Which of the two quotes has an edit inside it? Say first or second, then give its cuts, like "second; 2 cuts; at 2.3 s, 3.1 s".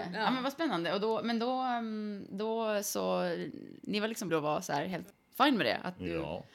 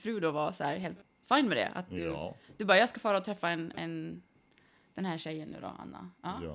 first; 1 cut; at 4.3 s